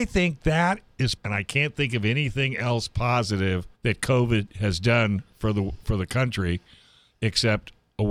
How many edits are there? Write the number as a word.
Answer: two